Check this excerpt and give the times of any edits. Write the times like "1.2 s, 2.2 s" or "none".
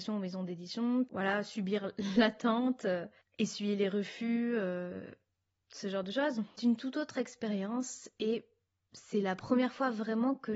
1.1 s, 6.6 s